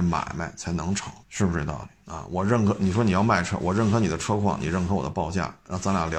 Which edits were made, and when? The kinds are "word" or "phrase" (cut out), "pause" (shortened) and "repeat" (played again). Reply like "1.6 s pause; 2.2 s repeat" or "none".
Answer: 1.2 s pause; 2.0 s pause